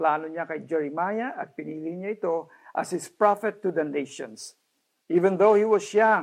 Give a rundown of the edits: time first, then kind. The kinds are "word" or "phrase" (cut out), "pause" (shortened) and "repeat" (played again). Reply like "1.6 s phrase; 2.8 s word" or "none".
none